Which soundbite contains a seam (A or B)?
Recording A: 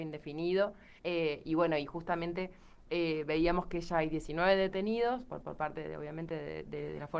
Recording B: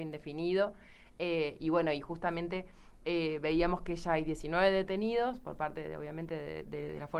A